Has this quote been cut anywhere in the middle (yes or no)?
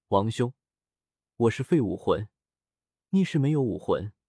no